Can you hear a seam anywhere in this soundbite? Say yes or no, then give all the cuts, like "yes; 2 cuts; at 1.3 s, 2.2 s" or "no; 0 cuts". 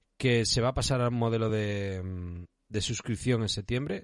no; 0 cuts